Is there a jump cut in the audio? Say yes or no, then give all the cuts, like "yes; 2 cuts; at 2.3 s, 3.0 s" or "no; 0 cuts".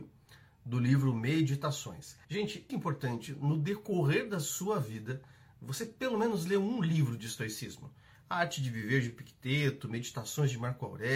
yes; 2 cuts; at 2.2 s, 2.7 s